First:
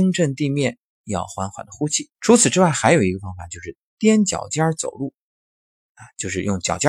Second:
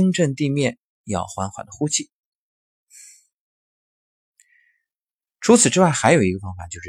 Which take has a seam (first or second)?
first